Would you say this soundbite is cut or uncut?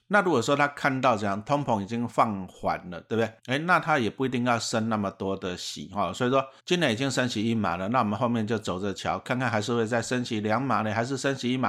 cut